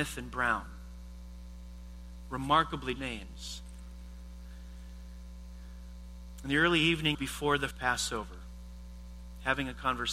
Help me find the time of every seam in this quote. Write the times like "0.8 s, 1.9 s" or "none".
3.0 s, 7.1 s, 7.7 s